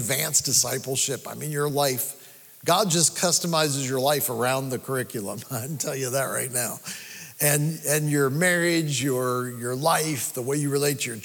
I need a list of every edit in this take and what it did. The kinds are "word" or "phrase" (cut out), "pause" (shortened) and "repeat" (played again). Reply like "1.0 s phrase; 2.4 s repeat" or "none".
none